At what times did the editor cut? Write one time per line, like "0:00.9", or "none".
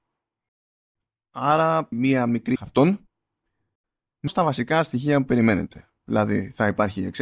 0:01.9
0:02.6
0:04.3

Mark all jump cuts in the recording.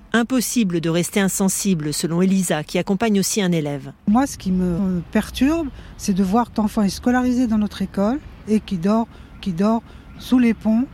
0:04.8
0:06.5
0:09.4

